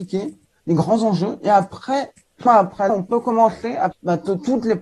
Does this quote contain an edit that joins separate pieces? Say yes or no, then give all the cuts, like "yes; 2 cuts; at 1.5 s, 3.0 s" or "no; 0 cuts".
yes; 3 cuts; at 2.5 s, 2.9 s, 3.9 s